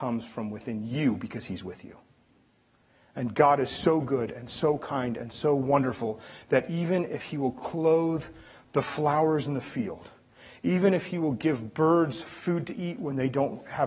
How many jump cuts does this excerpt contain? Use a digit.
0